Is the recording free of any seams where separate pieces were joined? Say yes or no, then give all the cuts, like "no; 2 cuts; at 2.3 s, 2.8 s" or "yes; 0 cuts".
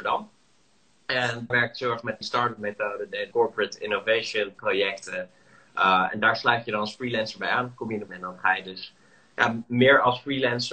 no; 4 cuts; at 1.5 s, 2.2 s, 3.3 s, 8.1 s